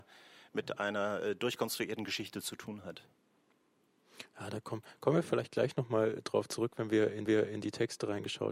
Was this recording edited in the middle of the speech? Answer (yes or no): yes